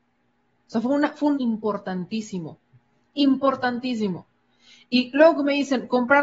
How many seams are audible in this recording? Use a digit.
1